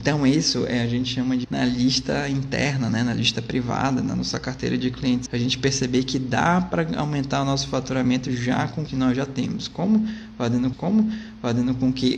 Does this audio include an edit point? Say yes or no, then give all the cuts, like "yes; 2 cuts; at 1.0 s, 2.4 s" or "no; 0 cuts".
yes; 4 cuts; at 1.4 s, 5.3 s, 8.9 s, 10.7 s